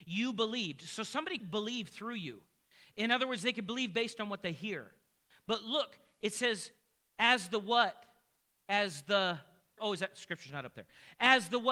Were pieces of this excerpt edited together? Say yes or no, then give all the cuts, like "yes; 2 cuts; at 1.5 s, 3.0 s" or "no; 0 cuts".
yes; 2 cuts; at 1.4 s, 9.8 s